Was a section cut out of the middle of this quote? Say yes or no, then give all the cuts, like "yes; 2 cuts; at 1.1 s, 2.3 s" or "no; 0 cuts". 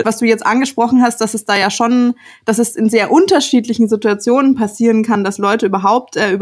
no; 0 cuts